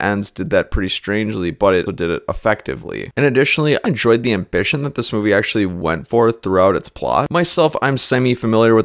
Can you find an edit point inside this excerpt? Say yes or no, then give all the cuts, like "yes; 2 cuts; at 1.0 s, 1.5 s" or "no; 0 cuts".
yes; 2 cuts; at 1.9 s, 3.8 s